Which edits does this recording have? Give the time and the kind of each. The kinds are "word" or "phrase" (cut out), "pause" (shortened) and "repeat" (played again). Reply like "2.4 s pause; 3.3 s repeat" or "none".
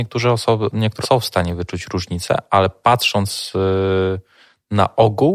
1.0 s word

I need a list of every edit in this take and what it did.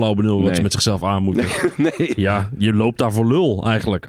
none

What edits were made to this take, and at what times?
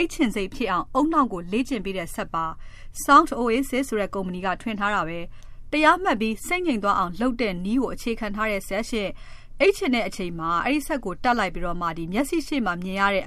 none

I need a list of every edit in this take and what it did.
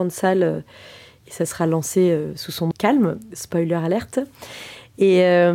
2.7 s phrase

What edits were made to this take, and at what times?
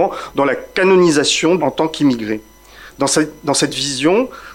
1.6 s word

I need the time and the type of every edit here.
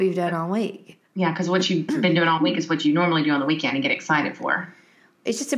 1.1 s pause

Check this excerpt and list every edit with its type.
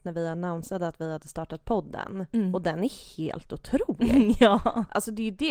none

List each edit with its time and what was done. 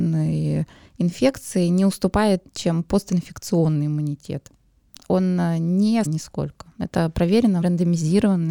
2.4 s word; 4.9 s pause; 6.1 s word; 7.6 s word

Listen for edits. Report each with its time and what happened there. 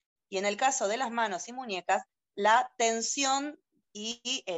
none

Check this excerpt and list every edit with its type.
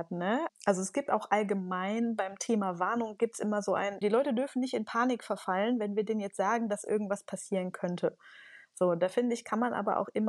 none

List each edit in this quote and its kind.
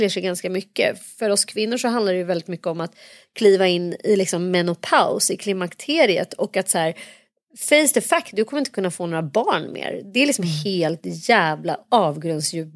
none

